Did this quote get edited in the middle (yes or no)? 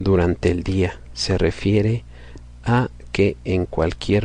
no